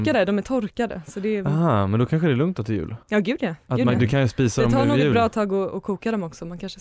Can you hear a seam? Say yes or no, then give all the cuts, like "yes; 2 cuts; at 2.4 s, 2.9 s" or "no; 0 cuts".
yes; 1 cut; at 3.0 s